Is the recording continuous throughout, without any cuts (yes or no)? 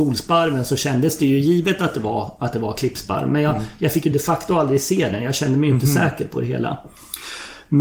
yes